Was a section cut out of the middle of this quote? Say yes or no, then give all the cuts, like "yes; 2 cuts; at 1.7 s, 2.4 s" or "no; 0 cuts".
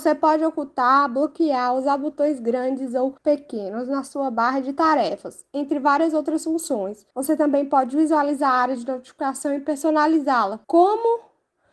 yes; 3 cuts; at 3.2 s, 7.1 s, 10.6 s